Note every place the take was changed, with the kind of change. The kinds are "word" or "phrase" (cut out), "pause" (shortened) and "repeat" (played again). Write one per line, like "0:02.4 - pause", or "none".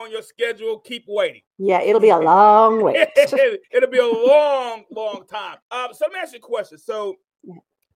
0:01.5 - pause
0:03.6 - pause
0:05.6 - pause